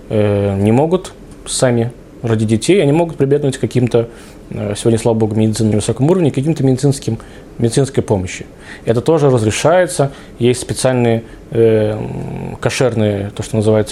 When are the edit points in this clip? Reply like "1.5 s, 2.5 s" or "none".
5.7 s